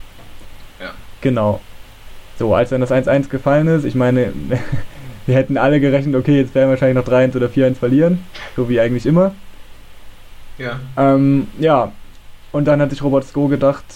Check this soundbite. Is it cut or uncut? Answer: uncut